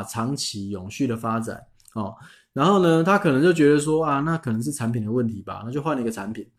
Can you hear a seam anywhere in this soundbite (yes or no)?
no